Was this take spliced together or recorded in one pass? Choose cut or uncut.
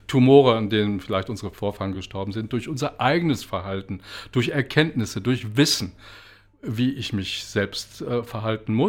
uncut